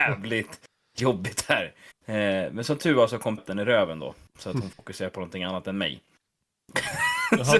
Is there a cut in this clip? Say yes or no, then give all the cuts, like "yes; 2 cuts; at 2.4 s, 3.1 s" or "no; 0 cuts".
yes; 2 cuts; at 1.9 s, 3.4 s